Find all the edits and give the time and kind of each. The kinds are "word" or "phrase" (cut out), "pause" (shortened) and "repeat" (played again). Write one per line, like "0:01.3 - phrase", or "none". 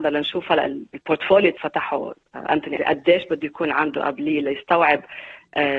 0:01.6 - word
0:02.8 - word

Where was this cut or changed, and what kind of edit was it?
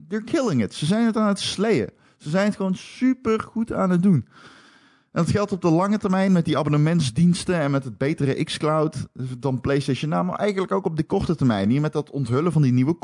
none

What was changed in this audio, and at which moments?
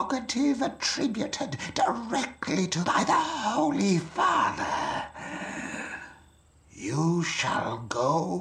0:02.8 - word
0:06.4 - pause

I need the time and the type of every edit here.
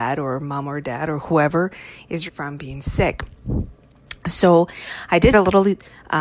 0:02.3 - word
0:05.3 - word

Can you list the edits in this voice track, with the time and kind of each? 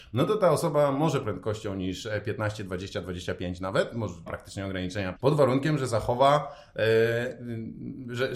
0:01.2 - phrase
0:04.3 - phrase
0:05.2 - word

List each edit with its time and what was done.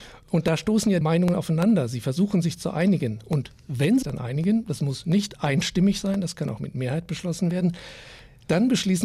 0:01.0 - word
0:04.0 - word

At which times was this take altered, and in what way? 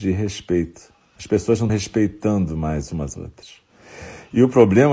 0:01.7 - word
0:03.1 - word

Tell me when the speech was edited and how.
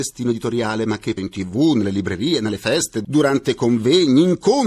0:01.2 - phrase

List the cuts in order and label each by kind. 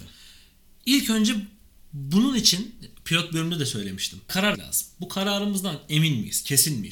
0:04.5 - word

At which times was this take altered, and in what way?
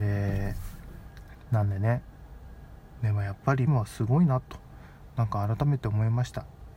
0:03.7 - word

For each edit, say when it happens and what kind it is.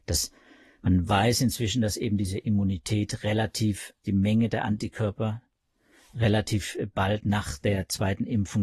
0:04.0 - word

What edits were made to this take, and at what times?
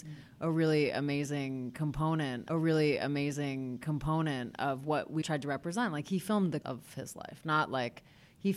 0:02.5 - repeat
0:05.2 - word
0:06.6 - word

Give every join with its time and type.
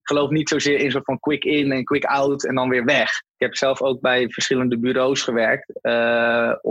0:03.3 - pause

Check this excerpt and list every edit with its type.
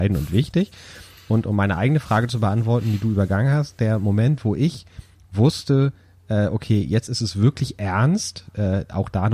none

